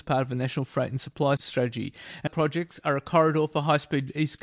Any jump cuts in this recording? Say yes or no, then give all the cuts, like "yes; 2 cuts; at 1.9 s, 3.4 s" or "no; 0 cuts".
yes; 2 cuts; at 1.4 s, 2.3 s